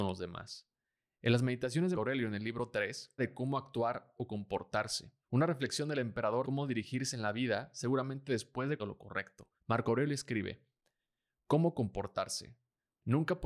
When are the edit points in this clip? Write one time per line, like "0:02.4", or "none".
0:01.9
0:03.2
0:05.2
0:06.4
0:08.8
0:09.6